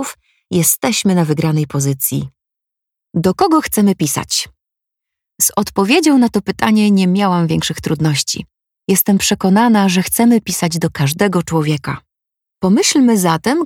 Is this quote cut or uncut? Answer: uncut